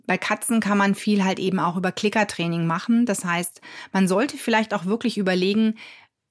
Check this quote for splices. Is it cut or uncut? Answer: uncut